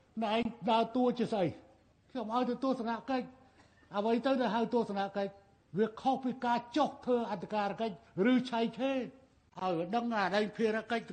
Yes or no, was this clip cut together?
no